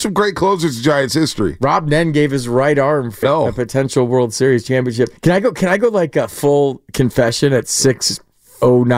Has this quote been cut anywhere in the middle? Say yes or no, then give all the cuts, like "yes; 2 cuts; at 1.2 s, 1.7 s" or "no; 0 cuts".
yes; 2 cuts; at 3.2 s, 5.2 s